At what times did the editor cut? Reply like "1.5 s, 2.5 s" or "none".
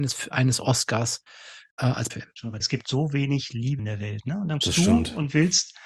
2.1 s, 2.6 s, 3.8 s, 4.6 s